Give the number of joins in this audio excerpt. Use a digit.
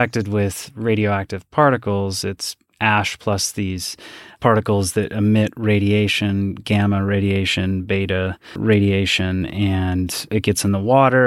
1